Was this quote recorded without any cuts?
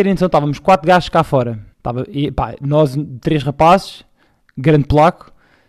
no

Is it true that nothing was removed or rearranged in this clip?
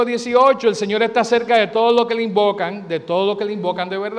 yes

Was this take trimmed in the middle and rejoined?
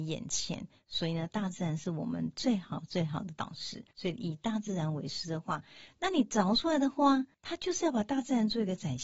yes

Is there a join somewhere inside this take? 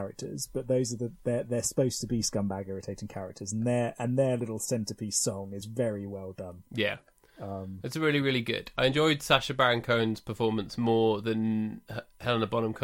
no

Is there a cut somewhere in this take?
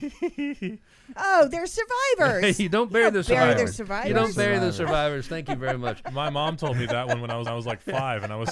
yes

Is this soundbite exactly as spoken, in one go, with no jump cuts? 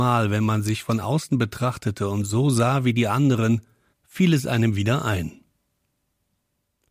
yes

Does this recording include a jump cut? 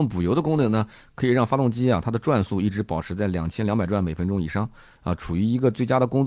no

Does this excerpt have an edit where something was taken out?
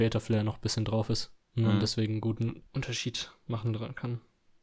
yes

